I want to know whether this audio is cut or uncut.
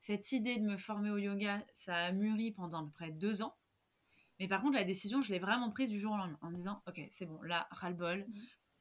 uncut